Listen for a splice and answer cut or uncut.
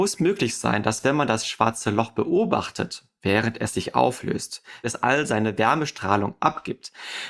cut